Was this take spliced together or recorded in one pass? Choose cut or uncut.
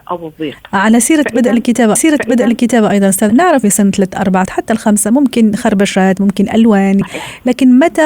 cut